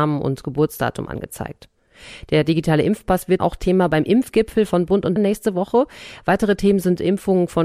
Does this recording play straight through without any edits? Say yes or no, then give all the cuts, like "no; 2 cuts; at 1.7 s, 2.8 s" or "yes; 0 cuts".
no; 2 cuts; at 3.4 s, 5.2 s